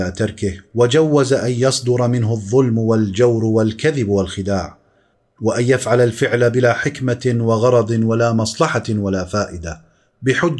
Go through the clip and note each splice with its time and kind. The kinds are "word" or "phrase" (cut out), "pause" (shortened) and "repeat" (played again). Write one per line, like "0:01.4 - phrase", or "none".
none